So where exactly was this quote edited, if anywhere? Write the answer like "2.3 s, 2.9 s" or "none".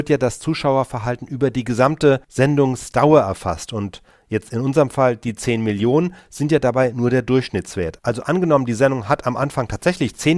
2.2 s